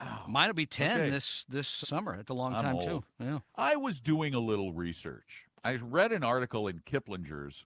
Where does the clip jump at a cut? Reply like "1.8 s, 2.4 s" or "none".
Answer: 1.8 s, 2.3 s, 3.5 s, 5.6 s